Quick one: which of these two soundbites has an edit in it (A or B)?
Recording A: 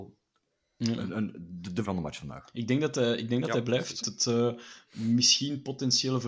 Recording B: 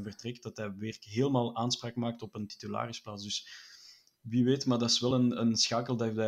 A